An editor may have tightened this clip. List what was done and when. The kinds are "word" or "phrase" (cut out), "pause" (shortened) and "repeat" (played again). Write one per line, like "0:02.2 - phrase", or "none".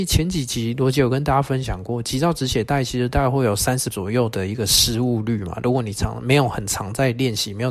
0:03.9 - word